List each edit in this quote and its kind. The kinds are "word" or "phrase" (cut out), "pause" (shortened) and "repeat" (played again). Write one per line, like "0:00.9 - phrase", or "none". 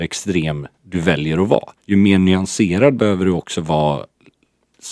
0:01.8 - pause